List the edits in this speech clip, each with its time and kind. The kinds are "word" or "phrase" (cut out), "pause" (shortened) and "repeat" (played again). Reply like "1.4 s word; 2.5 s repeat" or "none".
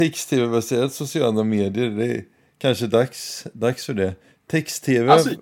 none